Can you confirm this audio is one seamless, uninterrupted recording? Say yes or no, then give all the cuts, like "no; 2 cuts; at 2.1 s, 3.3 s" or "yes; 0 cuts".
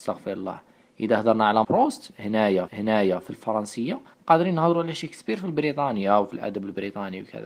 no; 3 cuts; at 1.6 s, 2.7 s, 4.1 s